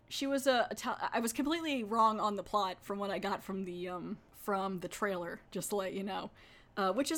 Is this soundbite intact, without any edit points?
yes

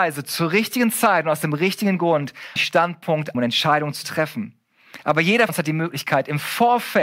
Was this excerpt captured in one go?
no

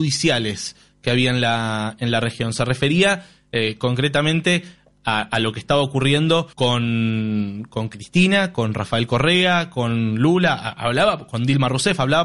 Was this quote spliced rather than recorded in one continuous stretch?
yes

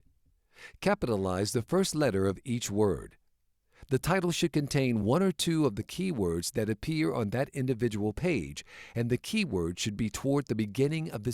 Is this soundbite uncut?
yes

